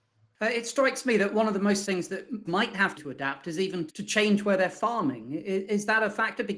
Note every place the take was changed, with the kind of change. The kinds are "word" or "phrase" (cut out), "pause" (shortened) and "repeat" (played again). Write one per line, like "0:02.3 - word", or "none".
0:01.8 - word
0:02.5 - word
0:03.0 - phrase
0:03.9 - word